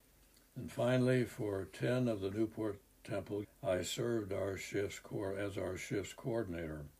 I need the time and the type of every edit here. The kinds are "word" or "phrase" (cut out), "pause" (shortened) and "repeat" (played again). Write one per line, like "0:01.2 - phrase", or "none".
0:03.4 - word

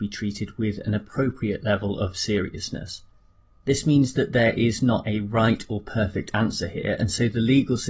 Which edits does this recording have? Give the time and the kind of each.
none

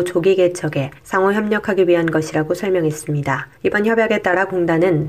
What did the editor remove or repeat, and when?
0:01.0 - pause
0:03.6 - pause

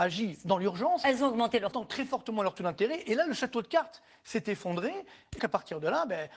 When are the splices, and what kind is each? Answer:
0:01.7 - word
0:05.4 - word

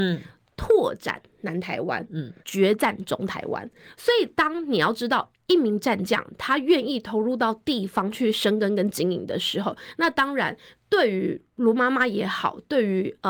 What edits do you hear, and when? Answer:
0:02.4 - pause

